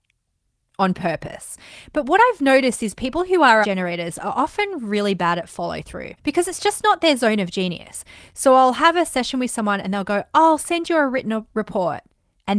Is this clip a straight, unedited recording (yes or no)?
no